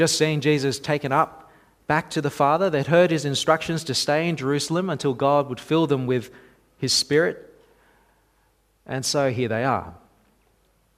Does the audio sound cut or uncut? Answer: uncut